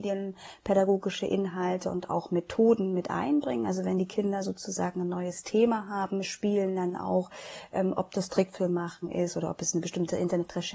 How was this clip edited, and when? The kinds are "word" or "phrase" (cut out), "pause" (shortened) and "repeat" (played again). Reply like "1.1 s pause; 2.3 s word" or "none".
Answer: none

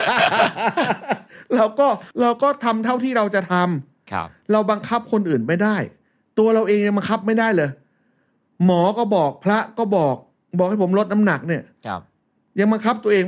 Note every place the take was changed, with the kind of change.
2.1 s pause

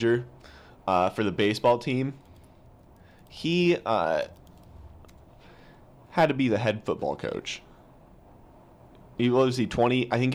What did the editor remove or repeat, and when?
none

